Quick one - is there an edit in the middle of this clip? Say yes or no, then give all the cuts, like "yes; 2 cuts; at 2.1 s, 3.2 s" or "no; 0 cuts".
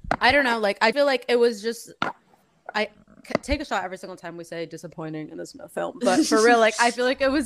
yes; 1 cut; at 0.9 s